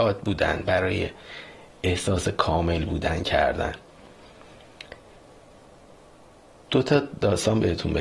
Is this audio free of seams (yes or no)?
yes